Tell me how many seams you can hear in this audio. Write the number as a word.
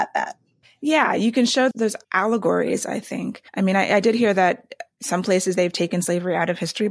three